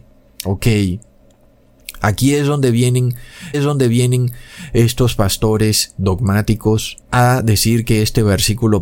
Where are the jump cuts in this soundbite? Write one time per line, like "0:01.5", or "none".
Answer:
0:03.5
0:07.0

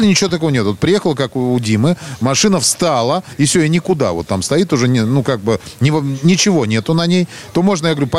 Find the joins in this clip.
none

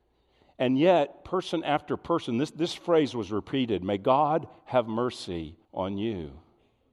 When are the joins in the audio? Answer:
0:05.6

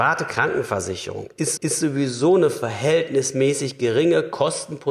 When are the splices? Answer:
0:01.6

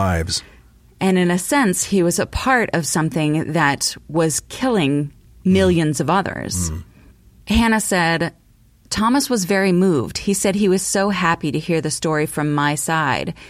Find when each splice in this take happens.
none

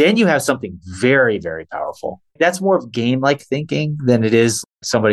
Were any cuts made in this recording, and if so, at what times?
0:02.3

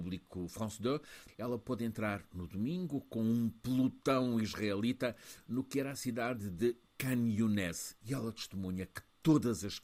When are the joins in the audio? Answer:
none

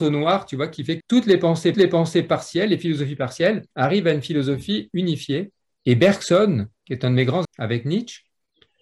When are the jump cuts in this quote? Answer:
0:01.0
0:01.7
0:03.7
0:05.6
0:06.8
0:07.4

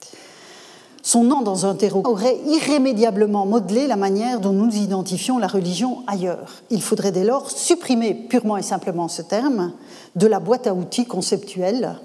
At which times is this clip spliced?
0:01.3
0:02.0

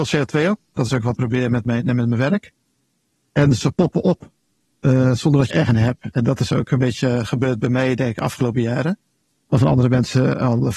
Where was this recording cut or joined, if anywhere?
0:01.1
0:03.6
0:05.5

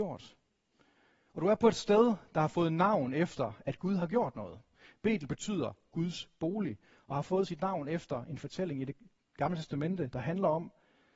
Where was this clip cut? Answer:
none

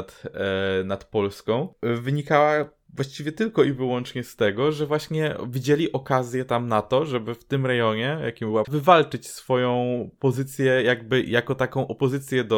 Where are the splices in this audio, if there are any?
0:08.6

